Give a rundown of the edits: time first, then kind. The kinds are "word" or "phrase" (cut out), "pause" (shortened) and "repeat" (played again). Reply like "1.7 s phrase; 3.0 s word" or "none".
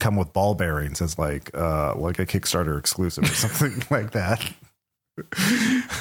none